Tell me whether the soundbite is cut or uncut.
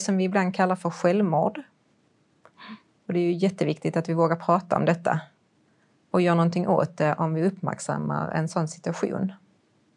uncut